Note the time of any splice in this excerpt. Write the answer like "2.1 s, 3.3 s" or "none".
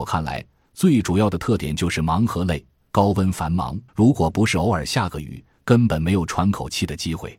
2.8 s, 3.9 s